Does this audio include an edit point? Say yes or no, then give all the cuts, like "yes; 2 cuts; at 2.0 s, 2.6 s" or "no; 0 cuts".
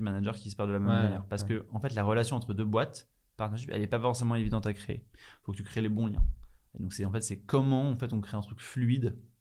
no; 0 cuts